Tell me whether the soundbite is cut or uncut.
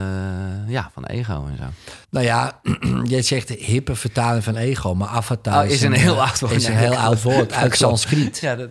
cut